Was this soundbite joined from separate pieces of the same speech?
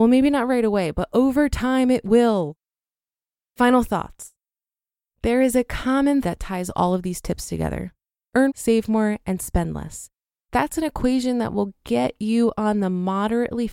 yes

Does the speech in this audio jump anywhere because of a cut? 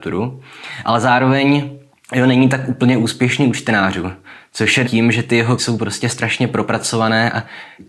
yes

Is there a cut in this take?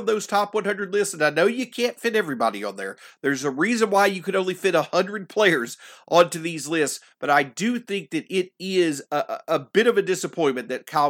no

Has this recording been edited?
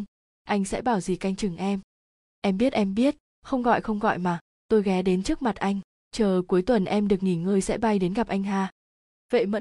no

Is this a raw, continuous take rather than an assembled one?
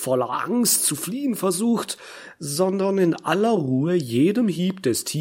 yes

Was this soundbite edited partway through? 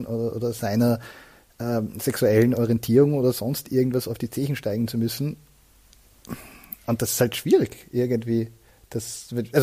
no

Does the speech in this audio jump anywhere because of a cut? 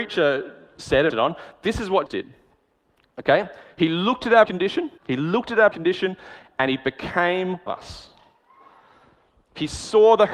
yes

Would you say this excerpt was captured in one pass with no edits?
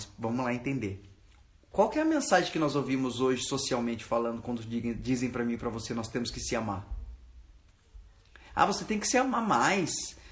yes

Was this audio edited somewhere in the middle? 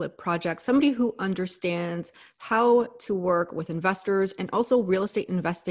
no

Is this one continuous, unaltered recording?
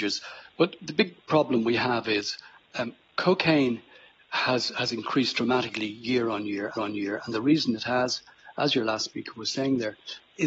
no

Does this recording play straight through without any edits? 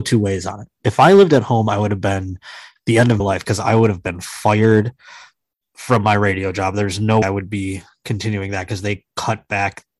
no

